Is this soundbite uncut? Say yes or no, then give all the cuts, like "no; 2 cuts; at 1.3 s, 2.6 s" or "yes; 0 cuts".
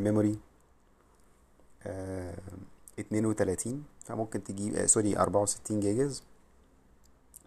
yes; 0 cuts